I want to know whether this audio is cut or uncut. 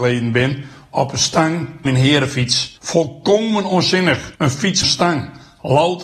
cut